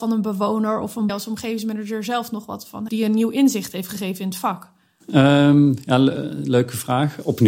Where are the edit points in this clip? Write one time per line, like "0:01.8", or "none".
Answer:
0:01.1
0:02.9